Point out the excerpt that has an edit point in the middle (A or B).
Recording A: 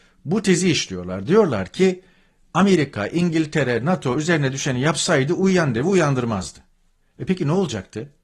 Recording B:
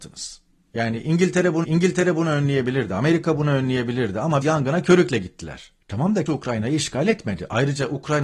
B